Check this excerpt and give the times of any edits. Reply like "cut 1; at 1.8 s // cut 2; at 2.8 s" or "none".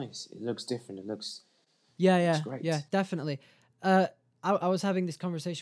none